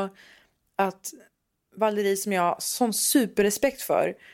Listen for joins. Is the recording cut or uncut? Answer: uncut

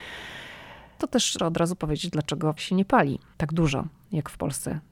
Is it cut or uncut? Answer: cut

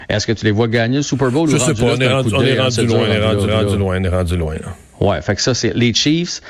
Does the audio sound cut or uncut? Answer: cut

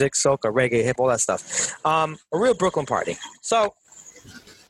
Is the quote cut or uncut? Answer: cut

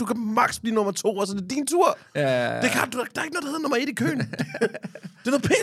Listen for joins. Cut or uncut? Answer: uncut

